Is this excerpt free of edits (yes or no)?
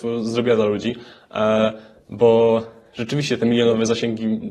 yes